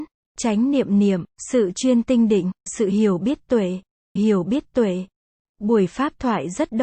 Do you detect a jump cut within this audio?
yes; 3 cuts; at 1.3 s, 2.7 s, 4.2 s

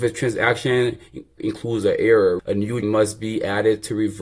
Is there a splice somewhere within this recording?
yes; 3 cuts; at 1.4 s, 2.4 s, 2.8 s

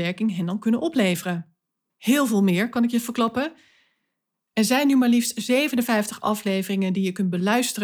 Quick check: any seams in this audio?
no; 0 cuts

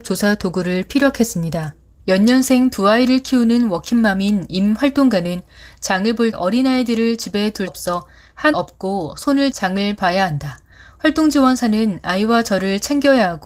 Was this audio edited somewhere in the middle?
yes; 4 cuts; at 6.3 s, 7.7 s, 8.5 s, 9.5 s

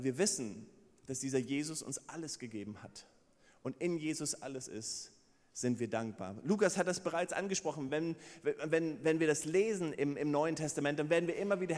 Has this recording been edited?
no; 0 cuts

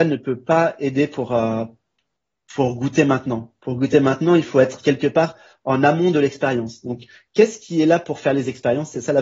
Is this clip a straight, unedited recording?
yes; 0 cuts

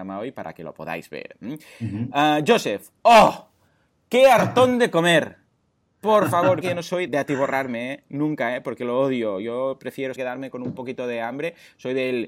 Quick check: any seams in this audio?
yes; 3 cuts; at 6.6 s, 7.1 s, 10.2 s

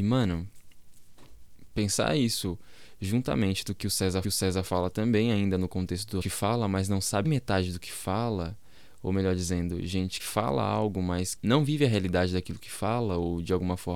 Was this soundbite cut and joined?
yes; 5 cuts; at 4.2 s, 6.2 s, 7.2 s, 10.2 s, 11.4 s

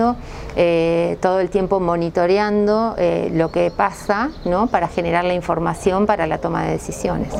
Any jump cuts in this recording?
no; 0 cuts

